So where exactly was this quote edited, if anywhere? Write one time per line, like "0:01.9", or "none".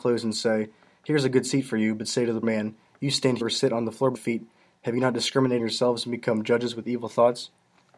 0:02.4
0:03.4
0:04.1
0:05.6